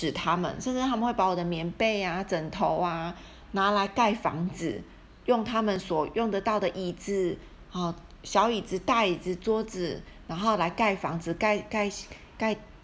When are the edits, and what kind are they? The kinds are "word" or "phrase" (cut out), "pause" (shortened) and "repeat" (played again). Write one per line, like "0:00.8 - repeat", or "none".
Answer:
none